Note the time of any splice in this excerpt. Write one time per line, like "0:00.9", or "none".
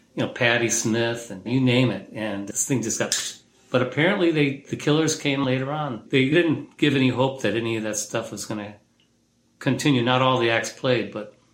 none